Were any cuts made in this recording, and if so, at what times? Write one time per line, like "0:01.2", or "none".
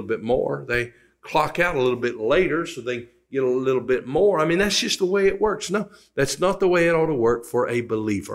none